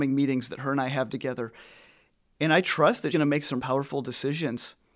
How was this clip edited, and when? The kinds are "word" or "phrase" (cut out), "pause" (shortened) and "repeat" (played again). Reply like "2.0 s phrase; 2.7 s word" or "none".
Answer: 3.1 s word; 3.6 s word